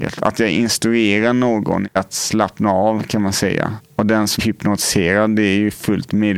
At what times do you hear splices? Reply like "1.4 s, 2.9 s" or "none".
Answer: 4.4 s